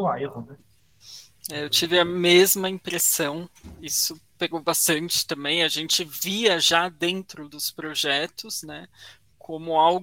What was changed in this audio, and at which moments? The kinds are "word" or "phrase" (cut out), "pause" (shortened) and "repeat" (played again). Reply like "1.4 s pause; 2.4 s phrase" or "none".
none